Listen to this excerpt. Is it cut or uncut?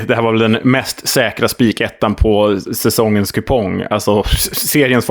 uncut